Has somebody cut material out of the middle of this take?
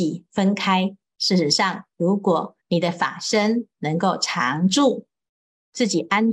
yes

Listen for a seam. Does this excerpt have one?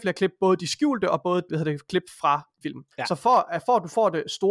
yes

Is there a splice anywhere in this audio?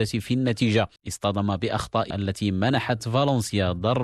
yes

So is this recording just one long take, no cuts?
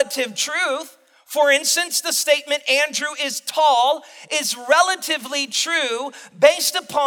yes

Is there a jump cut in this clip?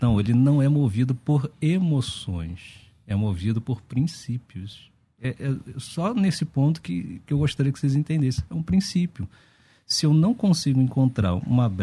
no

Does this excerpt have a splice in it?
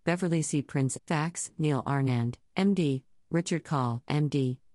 yes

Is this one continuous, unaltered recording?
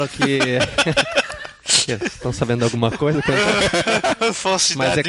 yes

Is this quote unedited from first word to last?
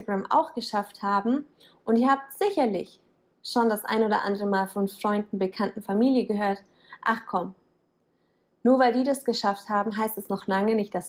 yes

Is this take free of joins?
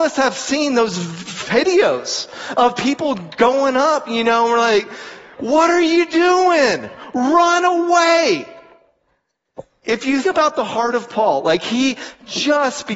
no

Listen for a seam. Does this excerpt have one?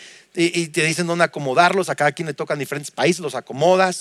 no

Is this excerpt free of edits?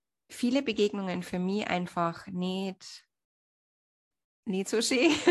yes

